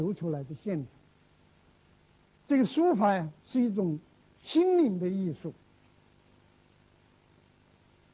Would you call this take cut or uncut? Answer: uncut